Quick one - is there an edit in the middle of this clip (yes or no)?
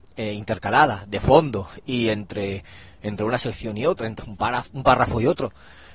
yes